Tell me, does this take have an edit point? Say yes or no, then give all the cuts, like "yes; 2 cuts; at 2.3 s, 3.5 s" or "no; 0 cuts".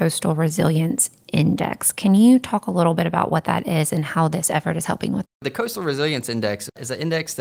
yes; 1 cut; at 5.2 s